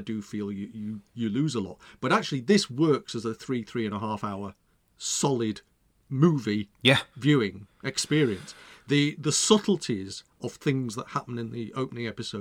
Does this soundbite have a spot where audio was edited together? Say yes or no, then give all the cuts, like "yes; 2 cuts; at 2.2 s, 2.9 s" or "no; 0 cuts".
no; 0 cuts